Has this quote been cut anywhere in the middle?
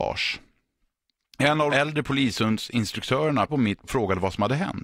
yes; 3 cuts; at 1.7 s, 3.5 s, 3.8 s

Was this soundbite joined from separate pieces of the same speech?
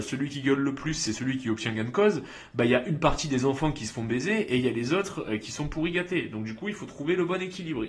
no; 0 cuts

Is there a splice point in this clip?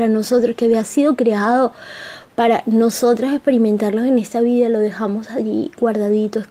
no; 0 cuts

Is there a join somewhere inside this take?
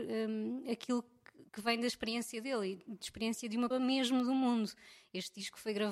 yes; 2 cuts; at 1.5 s, 3.7 s

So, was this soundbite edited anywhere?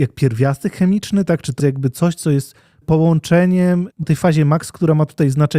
yes; 3 cuts; at 1.6 s, 2.8 s, 4.0 s

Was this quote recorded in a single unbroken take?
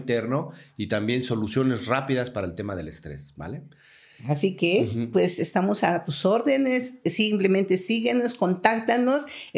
yes; 0 cuts

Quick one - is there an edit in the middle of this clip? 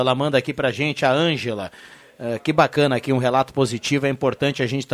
no; 0 cuts

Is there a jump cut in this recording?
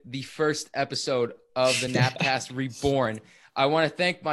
no; 0 cuts

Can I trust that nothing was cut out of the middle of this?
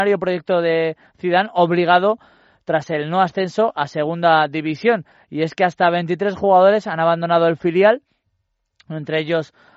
yes; 0 cuts

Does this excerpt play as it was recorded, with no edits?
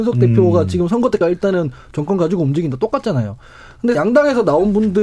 no; 2 cuts; at 1.2 s, 3.9 s

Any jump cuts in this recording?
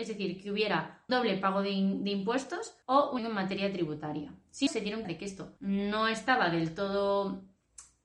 yes; 6 cuts; at 1.1 s, 2.8 s, 3.2 s, 4.7 s, 5.0 s, 5.6 s

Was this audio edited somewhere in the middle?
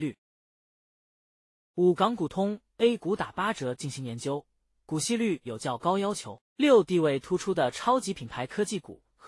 yes; 1 cut; at 6.5 s

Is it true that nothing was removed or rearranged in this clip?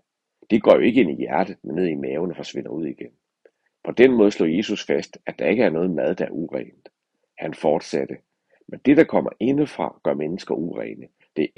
yes; 0 cuts

